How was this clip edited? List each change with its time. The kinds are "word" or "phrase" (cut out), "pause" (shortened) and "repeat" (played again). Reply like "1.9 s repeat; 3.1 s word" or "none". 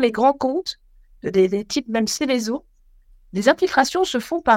none